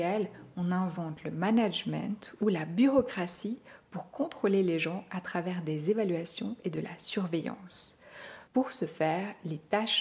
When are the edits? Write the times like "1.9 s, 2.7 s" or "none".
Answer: 8.5 s